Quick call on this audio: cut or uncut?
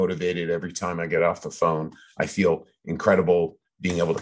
uncut